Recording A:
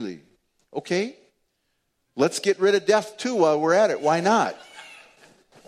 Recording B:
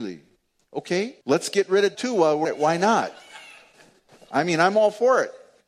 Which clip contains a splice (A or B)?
B